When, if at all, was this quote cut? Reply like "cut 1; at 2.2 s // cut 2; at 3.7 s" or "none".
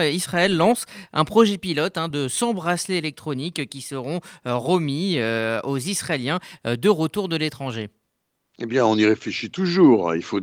none